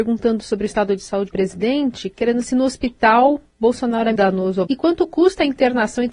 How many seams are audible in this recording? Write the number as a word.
four